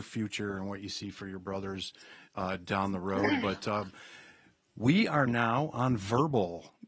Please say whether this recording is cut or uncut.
uncut